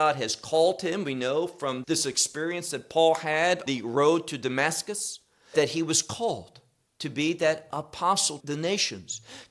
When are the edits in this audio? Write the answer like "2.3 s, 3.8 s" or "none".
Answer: 1.8 s, 3.7 s, 5.5 s, 8.4 s